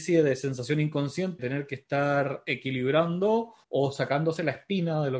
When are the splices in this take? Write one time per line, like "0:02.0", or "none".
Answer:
0:01.4
0:03.6